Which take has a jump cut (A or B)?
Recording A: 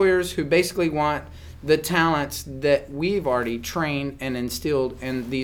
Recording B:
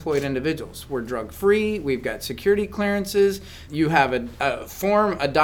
B